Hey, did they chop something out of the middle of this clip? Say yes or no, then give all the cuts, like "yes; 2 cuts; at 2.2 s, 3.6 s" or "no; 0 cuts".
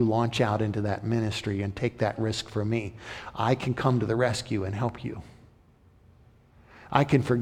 no; 0 cuts